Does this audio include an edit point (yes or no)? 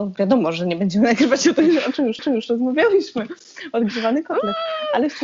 yes